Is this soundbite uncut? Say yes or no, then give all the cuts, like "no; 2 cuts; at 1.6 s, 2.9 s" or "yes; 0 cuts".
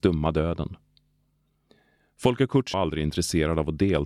no; 1 cut; at 2.7 s